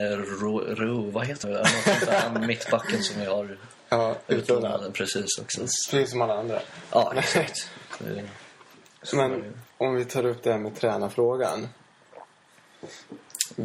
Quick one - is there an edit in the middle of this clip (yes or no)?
yes